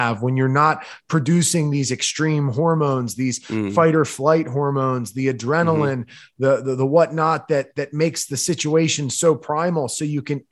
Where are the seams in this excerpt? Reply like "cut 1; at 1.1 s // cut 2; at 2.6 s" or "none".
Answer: none